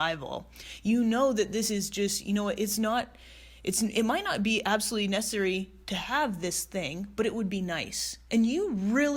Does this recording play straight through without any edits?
yes; 0 cuts

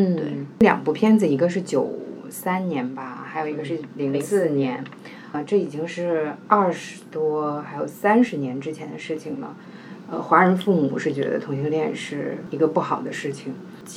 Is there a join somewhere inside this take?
yes; 1 cut; at 5.3 s

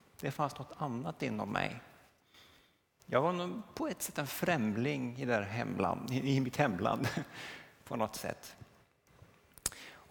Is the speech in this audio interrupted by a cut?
no; 0 cuts

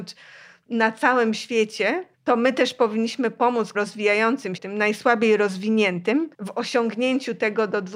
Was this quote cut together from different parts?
yes; 4 cuts; at 2.1 s, 3.7 s, 4.6 s, 6.3 s

